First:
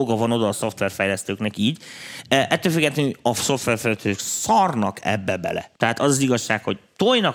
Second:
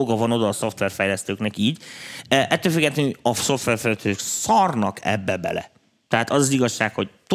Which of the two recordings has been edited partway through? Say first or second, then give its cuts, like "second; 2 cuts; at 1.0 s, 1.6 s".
first; 1 cut; at 5.8 s